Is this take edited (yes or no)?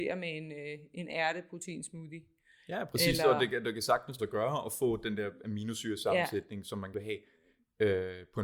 yes